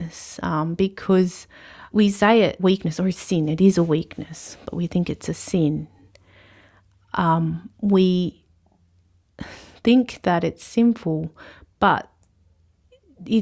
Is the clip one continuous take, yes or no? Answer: no